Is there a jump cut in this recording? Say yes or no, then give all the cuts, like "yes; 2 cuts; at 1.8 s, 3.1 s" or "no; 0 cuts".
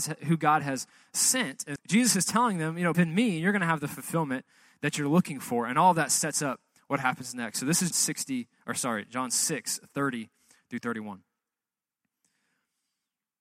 yes; 3 cuts; at 1.8 s, 2.9 s, 7.9 s